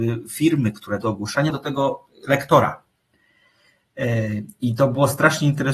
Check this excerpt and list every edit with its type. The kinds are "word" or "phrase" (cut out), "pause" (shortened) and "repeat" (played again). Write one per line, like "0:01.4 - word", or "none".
0:01.0 - word
0:01.5 - word